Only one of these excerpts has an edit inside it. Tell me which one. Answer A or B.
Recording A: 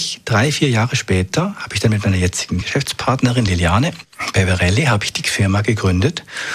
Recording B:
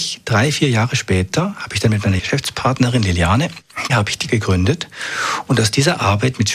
B